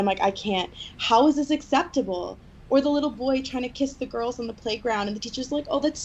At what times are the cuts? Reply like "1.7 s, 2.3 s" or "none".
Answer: none